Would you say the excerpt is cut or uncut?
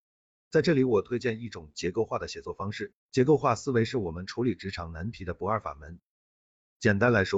cut